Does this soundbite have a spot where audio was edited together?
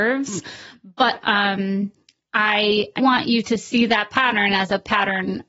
yes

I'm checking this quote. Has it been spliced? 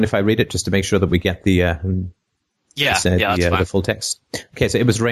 no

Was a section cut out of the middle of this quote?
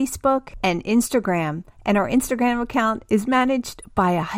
no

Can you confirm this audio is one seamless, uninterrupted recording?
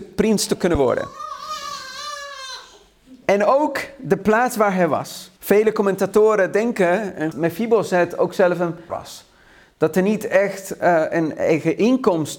no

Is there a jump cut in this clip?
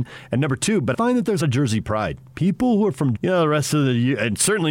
yes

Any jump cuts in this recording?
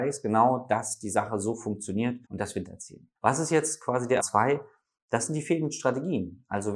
yes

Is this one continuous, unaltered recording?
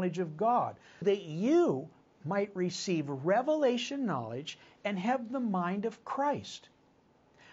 no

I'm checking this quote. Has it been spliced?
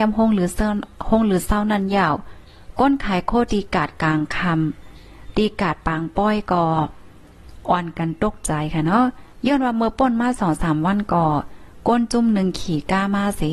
no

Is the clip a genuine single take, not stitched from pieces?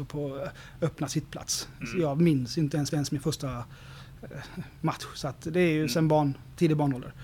no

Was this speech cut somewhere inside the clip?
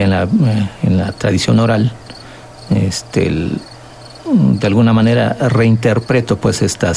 no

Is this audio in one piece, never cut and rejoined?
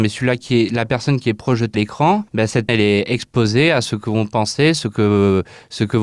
no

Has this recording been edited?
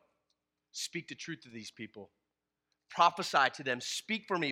no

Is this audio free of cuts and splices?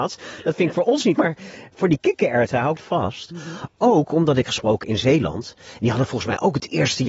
no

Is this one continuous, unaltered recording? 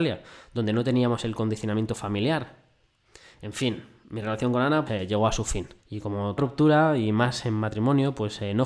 no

